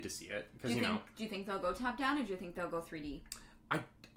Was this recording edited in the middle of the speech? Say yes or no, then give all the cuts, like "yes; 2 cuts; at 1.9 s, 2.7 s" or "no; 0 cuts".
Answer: no; 0 cuts